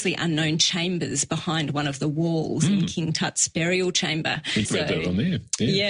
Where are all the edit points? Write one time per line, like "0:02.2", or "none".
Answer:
0:04.6